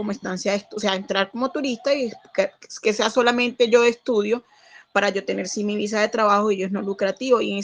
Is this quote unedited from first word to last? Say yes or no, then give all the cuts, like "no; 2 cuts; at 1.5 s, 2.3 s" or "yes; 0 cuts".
yes; 0 cuts